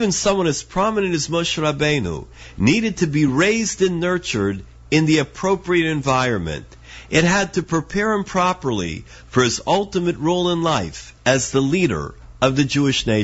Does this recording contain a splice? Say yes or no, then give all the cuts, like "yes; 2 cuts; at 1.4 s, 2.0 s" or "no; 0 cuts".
no; 0 cuts